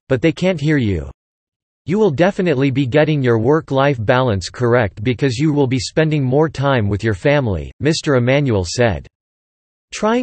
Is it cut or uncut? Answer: cut